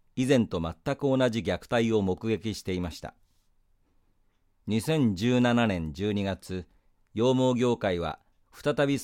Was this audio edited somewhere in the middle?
no; 0 cuts

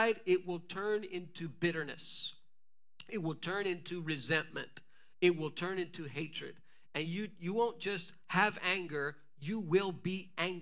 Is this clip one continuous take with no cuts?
yes; 0 cuts

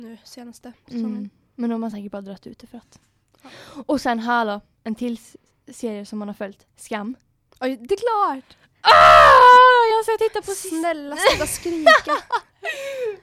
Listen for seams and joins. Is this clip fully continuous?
yes; 0 cuts

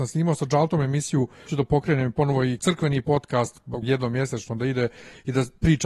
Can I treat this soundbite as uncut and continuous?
no; 3 cuts; at 1.5 s, 2.6 s, 3.8 s

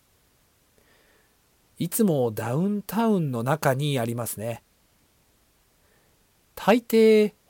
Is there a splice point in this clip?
no; 0 cuts

